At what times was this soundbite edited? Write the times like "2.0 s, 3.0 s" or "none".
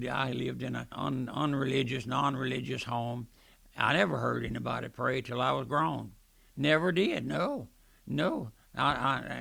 0.9 s